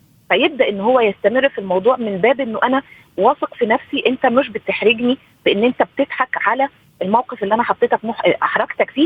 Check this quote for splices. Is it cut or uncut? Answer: uncut